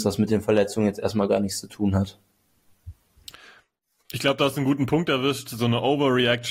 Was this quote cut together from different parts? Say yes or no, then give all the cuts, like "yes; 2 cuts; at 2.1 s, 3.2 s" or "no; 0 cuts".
no; 0 cuts